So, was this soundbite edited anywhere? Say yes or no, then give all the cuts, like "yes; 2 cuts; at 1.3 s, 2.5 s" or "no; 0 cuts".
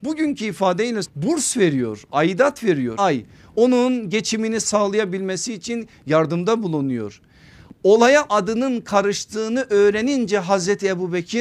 yes; 3 cuts; at 1.0 s, 3.0 s, 8.3 s